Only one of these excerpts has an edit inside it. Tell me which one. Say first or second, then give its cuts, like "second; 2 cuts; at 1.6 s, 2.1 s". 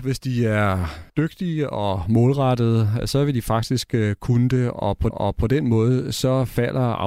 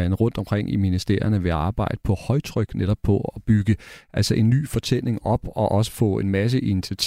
first; 2 cuts; at 1.1 s, 5.1 s